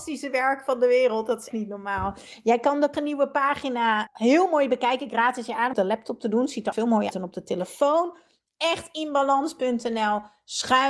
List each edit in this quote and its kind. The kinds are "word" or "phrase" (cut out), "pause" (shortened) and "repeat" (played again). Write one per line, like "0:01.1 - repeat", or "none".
0:01.5 - word
0:02.9 - word
0:04.1 - word
0:05.7 - word
0:06.7 - word
0:07.1 - word

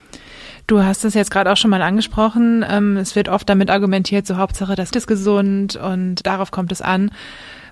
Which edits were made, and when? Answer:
0:04.9 - word
0:06.2 - word

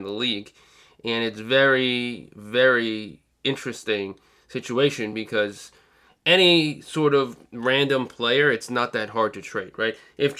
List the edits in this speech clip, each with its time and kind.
none

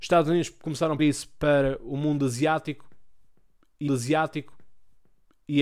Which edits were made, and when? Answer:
0:01.0 - word
0:03.9 - repeat

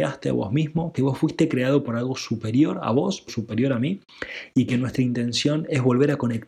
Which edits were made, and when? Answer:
0:03.3 - word

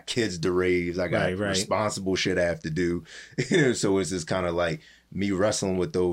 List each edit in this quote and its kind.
none

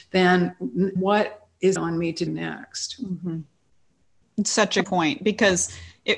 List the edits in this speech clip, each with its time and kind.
0:01.0 - word
0:01.8 - word
0:02.3 - word
0:04.8 - word

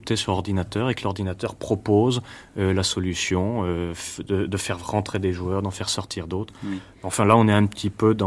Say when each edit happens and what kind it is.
none

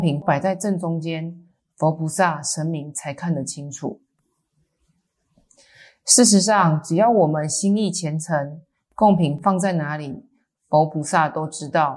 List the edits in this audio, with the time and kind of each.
none

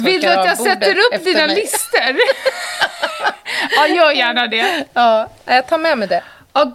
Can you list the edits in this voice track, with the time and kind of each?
none

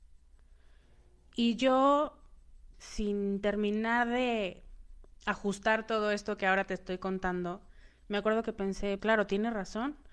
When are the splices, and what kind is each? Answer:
0:02.7 - word
0:09.0 - word

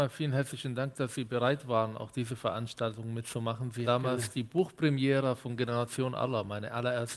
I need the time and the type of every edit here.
0:03.8 - word

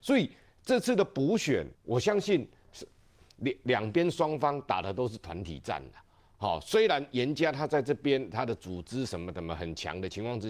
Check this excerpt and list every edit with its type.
0:01.7 - pause

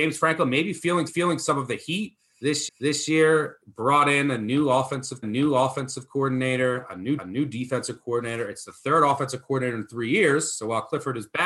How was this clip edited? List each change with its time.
0:01.1 - repeat
0:02.7 - repeat
0:05.2 - repeat
0:07.2 - repeat

